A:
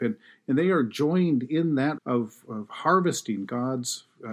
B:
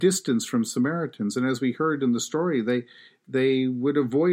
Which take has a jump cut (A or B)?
A